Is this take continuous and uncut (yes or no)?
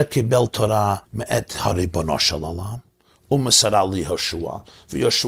no